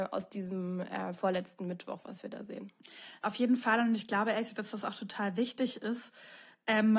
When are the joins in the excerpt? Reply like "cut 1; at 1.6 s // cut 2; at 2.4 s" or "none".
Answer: none